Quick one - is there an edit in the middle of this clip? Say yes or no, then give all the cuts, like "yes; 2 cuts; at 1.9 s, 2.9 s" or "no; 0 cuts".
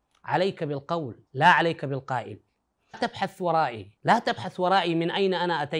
yes; 3 cuts; at 1.3 s, 2.9 s, 4.0 s